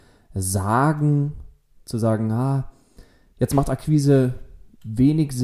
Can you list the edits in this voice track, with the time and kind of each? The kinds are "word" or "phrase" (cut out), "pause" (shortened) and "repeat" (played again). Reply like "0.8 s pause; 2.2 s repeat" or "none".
none